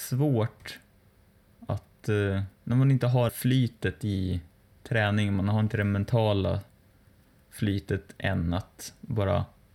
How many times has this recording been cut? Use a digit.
2